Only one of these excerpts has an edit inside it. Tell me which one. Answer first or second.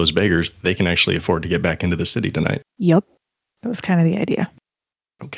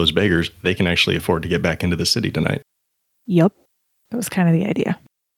first